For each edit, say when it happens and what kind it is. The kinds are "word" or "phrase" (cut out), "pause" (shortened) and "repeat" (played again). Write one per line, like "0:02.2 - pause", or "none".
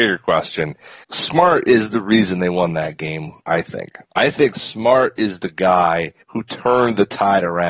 0:01.0 - pause
0:03.4 - pause
0:04.0 - pause
0:06.2 - pause